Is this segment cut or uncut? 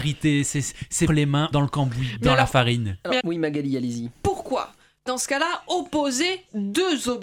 cut